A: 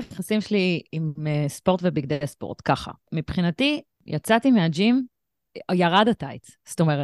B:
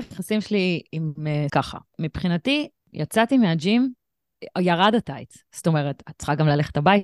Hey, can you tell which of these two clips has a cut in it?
B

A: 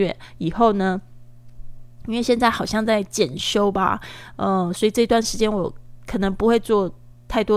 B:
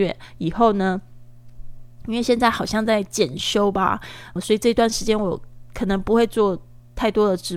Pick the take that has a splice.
B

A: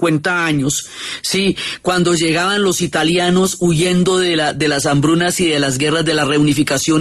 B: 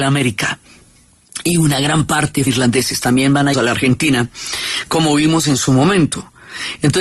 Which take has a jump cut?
B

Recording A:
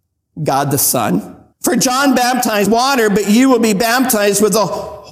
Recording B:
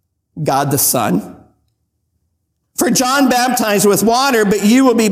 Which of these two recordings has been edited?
A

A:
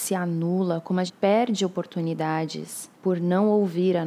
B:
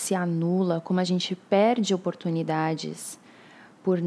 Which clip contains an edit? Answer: A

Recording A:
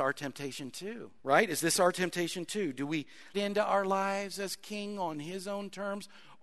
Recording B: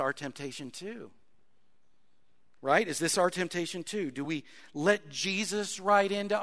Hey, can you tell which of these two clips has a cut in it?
A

